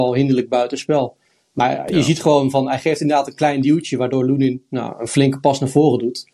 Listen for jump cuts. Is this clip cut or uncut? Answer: uncut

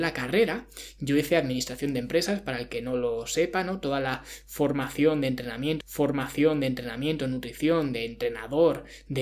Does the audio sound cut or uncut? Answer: cut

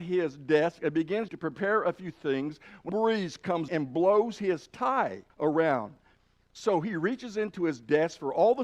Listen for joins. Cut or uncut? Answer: cut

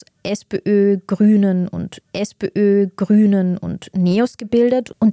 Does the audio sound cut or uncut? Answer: cut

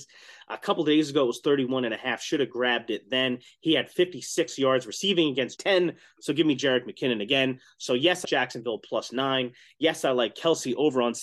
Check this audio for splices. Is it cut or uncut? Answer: cut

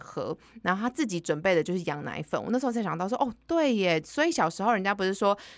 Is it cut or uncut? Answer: uncut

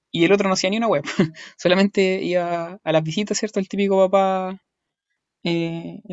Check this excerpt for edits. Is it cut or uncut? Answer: uncut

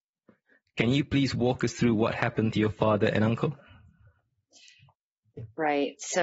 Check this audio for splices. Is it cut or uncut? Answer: uncut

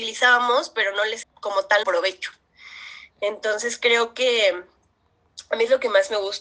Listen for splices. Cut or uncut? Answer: cut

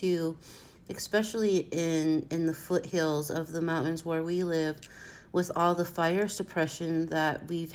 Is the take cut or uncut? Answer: uncut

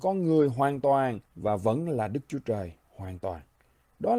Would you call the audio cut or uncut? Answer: cut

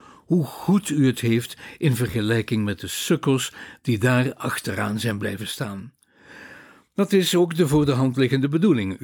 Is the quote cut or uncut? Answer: uncut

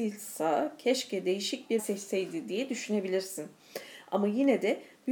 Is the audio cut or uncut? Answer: cut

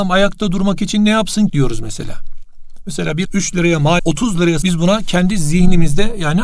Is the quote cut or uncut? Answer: cut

